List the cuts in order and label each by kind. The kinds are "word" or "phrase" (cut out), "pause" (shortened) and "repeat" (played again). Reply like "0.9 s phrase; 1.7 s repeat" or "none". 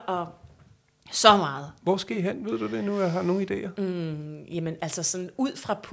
none